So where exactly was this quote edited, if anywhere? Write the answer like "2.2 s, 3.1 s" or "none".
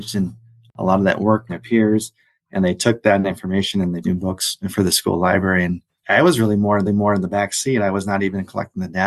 1.5 s, 4.0 s, 4.6 s, 6.0 s, 6.9 s